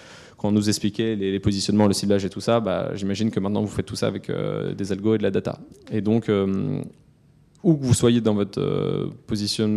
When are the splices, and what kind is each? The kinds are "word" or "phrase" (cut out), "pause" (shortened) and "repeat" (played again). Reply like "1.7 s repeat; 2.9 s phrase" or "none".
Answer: none